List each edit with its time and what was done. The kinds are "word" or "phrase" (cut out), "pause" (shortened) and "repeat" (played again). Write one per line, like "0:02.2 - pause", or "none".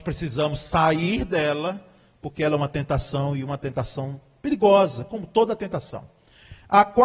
none